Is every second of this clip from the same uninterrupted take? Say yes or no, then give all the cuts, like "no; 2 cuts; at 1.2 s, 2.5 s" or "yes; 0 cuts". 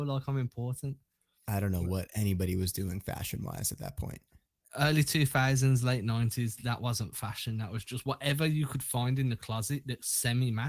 yes; 0 cuts